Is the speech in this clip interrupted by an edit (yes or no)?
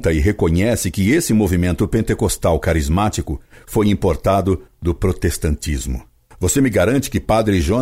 no